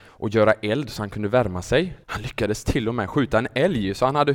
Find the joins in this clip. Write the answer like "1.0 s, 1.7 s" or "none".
2.0 s